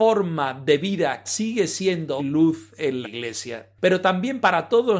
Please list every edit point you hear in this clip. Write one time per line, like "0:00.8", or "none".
0:01.2
0:02.2
0:03.0